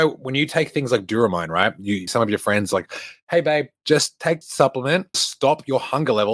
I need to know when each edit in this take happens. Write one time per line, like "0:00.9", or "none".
0:02.1
0:04.4
0:05.1